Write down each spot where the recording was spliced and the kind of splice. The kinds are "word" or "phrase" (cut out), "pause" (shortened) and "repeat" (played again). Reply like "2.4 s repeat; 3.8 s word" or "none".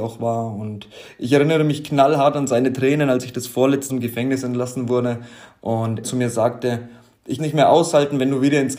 3.9 s phrase; 6.0 s word; 7.4 s phrase